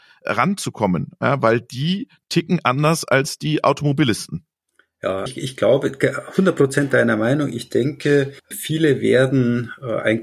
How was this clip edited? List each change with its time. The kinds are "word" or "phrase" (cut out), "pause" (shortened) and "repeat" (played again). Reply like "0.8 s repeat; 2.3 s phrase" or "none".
5.3 s word; 8.4 s pause